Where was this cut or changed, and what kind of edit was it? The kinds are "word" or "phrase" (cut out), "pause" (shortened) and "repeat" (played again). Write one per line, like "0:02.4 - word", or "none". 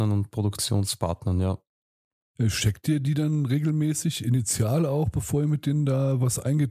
none